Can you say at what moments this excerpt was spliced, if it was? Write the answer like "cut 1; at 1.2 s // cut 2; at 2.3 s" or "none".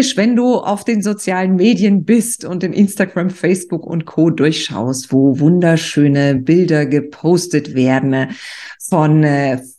none

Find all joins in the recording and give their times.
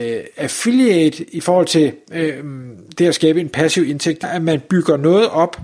cut 1; at 4.2 s

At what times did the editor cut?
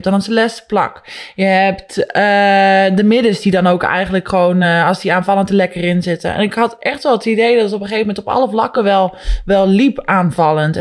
none

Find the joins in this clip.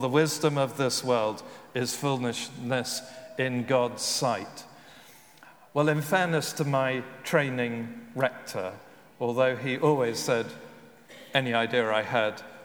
none

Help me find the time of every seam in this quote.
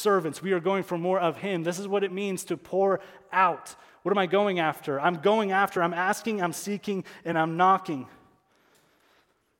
none

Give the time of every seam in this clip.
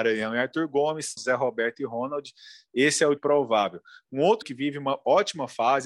cut 1; at 1.2 s // cut 2; at 3.2 s // cut 3; at 4.4 s

